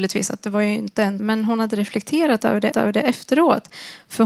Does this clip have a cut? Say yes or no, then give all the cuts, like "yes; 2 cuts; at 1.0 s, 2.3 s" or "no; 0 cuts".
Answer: yes; 2 cuts; at 1.2 s, 2.7 s